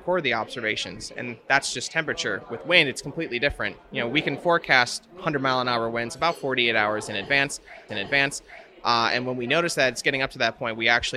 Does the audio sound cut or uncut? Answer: cut